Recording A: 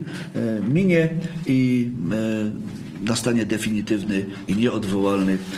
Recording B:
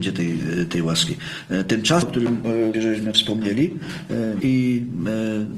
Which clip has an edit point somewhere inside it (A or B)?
B